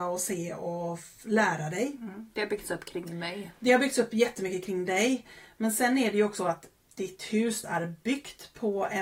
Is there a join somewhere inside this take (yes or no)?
yes